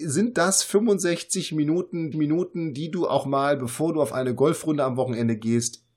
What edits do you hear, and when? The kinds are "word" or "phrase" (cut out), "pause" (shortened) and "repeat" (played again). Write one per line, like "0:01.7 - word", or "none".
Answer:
0:02.1 - repeat